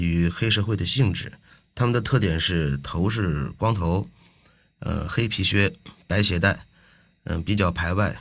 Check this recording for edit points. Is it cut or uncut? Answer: uncut